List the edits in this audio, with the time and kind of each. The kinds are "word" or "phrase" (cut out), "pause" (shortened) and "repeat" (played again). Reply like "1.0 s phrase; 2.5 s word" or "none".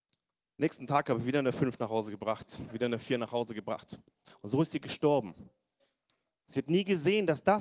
none